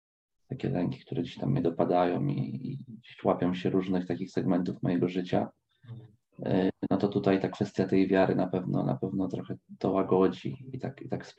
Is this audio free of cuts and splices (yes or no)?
yes